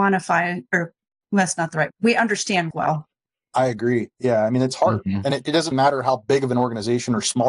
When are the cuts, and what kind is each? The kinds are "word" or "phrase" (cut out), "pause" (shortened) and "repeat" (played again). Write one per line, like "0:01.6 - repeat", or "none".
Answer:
0:01.9 - word
0:02.7 - word
0:05.7 - word